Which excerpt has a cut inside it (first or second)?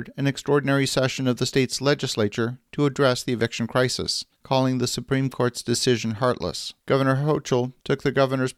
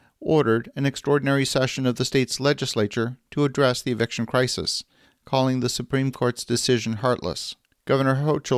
first